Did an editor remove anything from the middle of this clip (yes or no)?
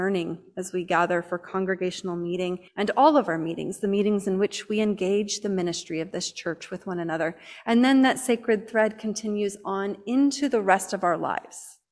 yes